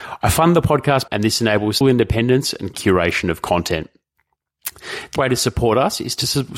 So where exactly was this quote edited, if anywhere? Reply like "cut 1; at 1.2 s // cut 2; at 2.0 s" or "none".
cut 1; at 1.1 s // cut 2; at 1.8 s // cut 3; at 2.7 s // cut 4; at 5.2 s